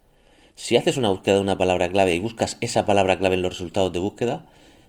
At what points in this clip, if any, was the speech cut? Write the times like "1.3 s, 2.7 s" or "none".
none

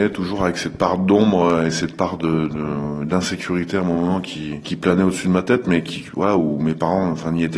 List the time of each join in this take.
none

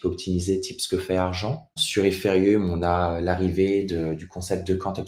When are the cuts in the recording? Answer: 1.8 s

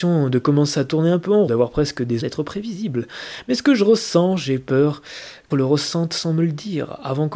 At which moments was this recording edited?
1.5 s, 2.2 s, 5.5 s

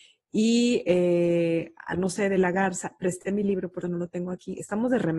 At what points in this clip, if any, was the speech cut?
1.9 s, 3.8 s

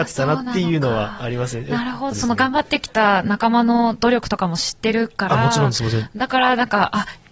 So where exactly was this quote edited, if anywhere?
2.1 s

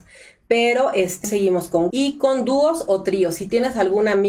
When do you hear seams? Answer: 1.2 s, 1.9 s

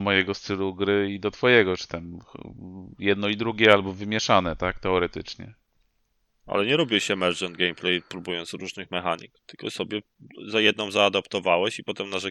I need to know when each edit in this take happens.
9.4 s

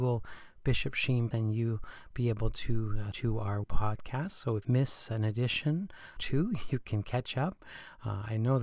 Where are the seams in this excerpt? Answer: 1.3 s, 3.1 s, 3.6 s, 4.6 s, 6.2 s

